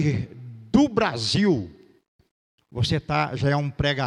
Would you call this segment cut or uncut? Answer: uncut